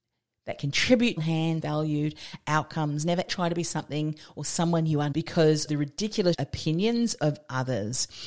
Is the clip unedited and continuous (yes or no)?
no